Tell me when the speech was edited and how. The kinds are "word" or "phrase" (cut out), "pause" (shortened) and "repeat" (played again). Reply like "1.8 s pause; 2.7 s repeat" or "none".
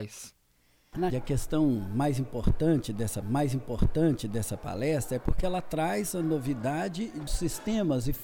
1.1 s word; 3.2 s repeat; 7.3 s phrase